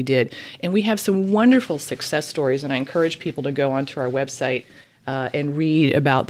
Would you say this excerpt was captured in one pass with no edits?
yes; 0 cuts

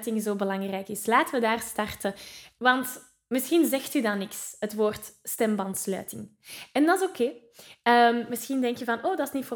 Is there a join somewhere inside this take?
no; 0 cuts

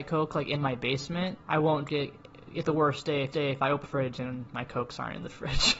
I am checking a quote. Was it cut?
yes; 5 cuts; at 1.4 s, 1.9 s, 2.6 s, 3.3 s, 3.8 s

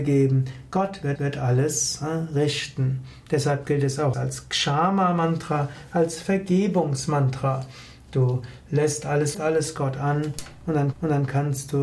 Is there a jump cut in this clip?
yes; 4 cuts; at 1.2 s, 4.1 s, 9.3 s, 10.9 s

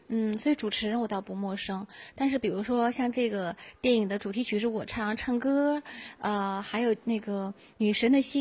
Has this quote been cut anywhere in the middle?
no; 0 cuts

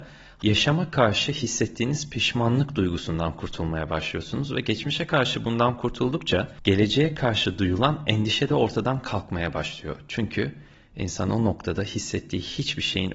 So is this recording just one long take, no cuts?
yes; 0 cuts

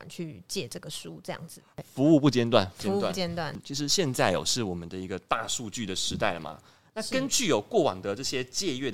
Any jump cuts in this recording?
yes; 1 cut; at 2.8 s

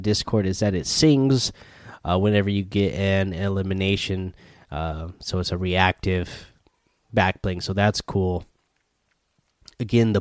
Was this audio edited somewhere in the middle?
no; 0 cuts

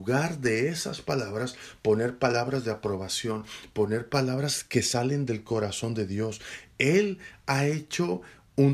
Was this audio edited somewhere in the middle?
no; 0 cuts

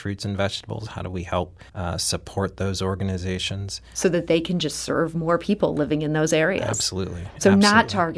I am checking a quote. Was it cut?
yes; 1 cut; at 1.7 s

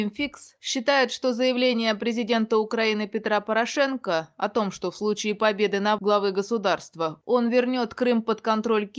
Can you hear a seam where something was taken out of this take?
yes; 1 cut; at 6.0 s

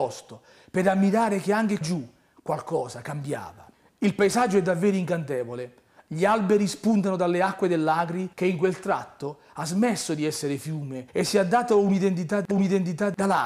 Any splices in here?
yes; 5 cuts; at 1.8 s, 3.7 s, 8.3 s, 11.1 s, 12.5 s

